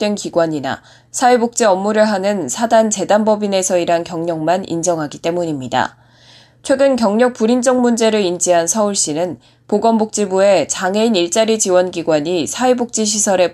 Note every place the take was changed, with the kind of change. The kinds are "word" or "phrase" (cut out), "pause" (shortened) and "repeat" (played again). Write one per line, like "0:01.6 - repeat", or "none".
none